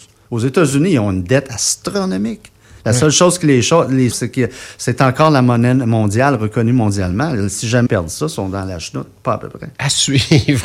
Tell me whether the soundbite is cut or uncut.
cut